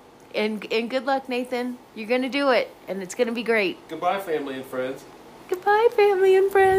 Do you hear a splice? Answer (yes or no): no